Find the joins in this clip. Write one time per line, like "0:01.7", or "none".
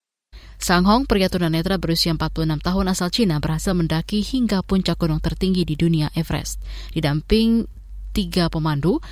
none